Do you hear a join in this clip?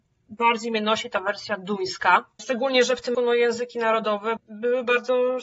yes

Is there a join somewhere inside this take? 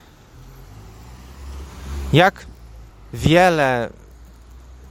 yes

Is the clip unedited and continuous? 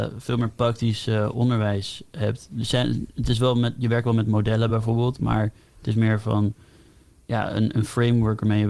yes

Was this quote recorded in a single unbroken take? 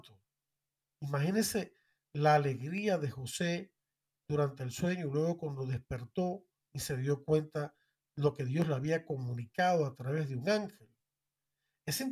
yes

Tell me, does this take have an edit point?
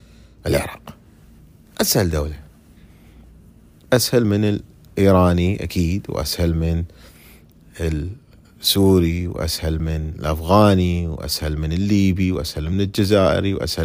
no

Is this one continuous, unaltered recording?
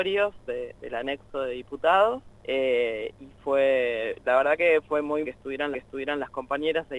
no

